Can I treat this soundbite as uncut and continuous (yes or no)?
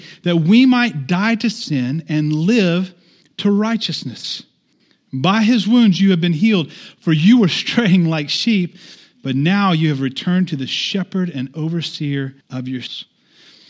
no